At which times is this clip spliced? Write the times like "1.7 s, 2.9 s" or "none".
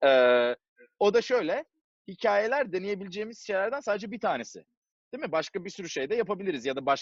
none